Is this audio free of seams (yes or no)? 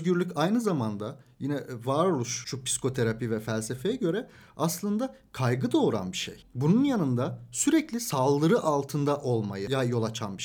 yes